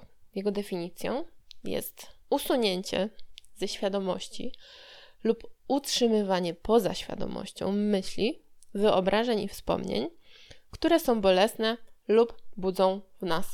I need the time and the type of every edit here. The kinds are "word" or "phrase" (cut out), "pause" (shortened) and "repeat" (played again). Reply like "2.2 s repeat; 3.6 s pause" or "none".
2.2 s pause